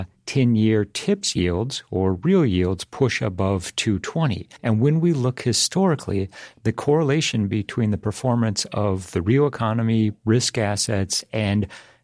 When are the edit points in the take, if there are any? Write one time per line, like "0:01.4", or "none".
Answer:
0:04.6